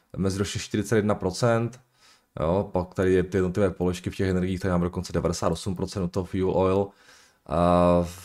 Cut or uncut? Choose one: uncut